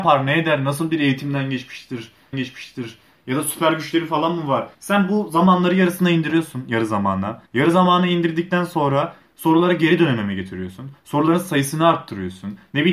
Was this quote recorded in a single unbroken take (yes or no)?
no